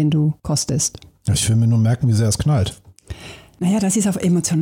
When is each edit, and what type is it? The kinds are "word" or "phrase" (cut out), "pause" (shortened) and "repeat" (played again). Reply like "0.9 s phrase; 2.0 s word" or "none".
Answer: none